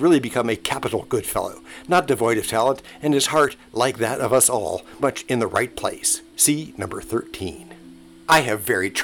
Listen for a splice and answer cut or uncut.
cut